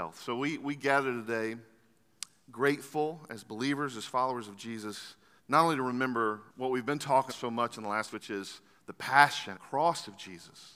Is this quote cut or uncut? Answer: cut